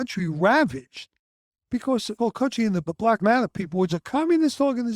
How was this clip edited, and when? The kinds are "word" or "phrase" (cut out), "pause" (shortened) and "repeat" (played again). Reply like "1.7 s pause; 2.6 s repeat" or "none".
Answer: 2.2 s word; 2.9 s word; 3.2 s word; 3.9 s word